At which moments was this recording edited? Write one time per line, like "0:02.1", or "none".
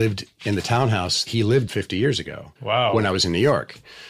0:01.3
0:01.7
0:02.6